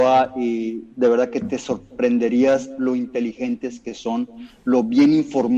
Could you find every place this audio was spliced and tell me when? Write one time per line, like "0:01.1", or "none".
0:00.9